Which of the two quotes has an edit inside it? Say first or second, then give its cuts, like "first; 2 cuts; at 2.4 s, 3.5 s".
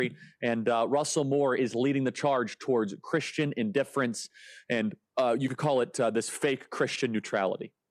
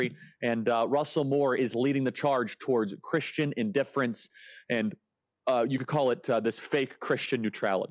first; 1 cut; at 5.1 s